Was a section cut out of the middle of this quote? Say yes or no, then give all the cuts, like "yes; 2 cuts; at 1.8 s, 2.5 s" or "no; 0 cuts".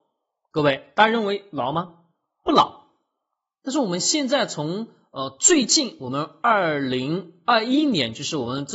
no; 0 cuts